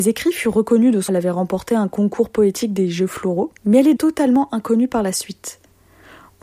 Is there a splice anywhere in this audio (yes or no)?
yes